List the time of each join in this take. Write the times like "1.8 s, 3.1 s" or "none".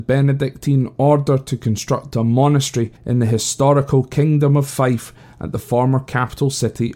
3.0 s